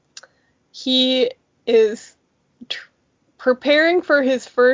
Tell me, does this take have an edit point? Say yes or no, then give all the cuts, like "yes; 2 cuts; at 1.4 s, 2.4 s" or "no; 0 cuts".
no; 0 cuts